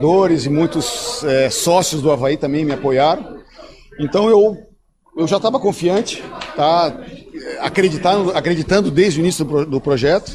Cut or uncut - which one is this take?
uncut